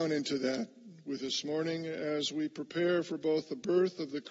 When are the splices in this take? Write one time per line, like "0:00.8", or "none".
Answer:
0:01.2